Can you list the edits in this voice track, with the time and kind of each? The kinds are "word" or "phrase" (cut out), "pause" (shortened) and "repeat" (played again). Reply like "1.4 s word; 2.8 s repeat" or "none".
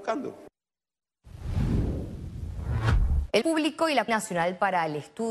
3.4 s word; 4.1 s word